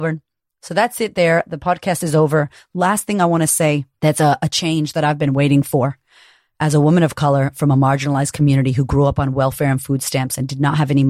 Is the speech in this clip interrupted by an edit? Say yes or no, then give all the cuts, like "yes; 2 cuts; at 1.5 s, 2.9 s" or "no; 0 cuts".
no; 0 cuts